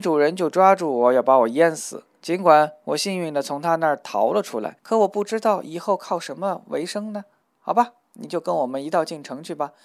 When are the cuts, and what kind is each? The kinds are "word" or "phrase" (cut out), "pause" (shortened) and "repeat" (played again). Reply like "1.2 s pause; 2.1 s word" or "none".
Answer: 2.2 s pause; 4.8 s pause; 7.4 s pause